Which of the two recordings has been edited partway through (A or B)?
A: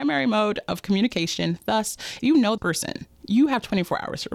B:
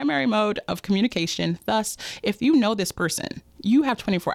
A